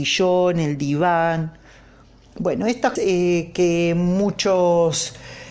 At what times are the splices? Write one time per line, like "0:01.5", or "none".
0:03.0